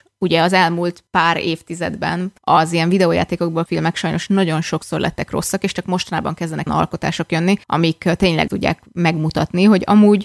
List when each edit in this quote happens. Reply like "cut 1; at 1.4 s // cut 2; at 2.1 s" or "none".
cut 1; at 1.1 s // cut 2; at 2.4 s // cut 3; at 3.7 s // cut 4; at 6.7 s // cut 5; at 7.6 s // cut 6; at 8.5 s

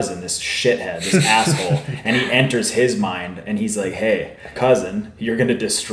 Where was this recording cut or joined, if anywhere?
cut 1; at 4.6 s

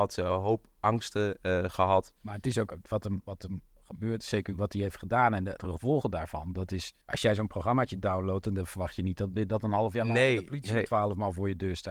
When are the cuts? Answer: cut 1; at 7.0 s

